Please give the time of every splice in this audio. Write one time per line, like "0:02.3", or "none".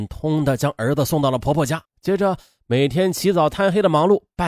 0:01.9